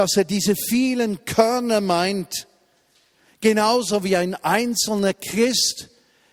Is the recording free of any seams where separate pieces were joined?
yes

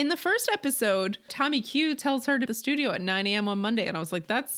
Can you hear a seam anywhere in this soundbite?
yes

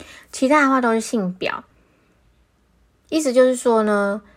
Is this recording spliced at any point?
no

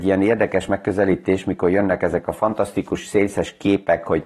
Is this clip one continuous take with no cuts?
yes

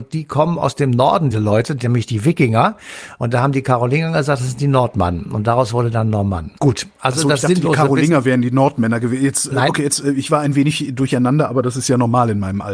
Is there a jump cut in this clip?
yes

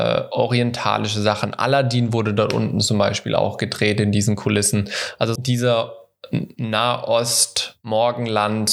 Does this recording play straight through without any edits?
no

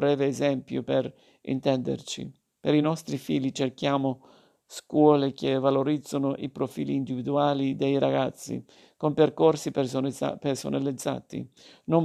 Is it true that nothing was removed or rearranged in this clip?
yes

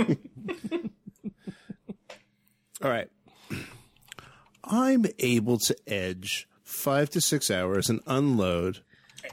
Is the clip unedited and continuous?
yes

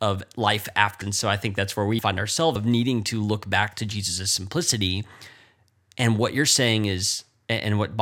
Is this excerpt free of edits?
no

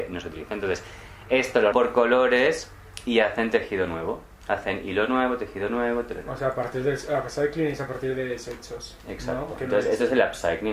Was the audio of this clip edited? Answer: yes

